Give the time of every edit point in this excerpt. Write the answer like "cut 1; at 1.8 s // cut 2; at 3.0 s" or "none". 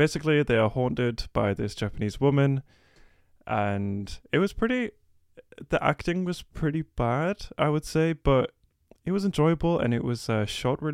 none